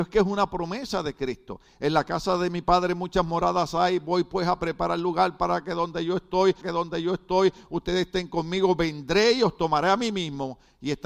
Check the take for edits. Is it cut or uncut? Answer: cut